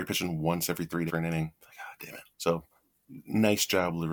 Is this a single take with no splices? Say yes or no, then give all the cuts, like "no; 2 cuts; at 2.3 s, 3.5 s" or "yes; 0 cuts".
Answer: no; 3 cuts; at 1.1 s, 2.0 s, 2.3 s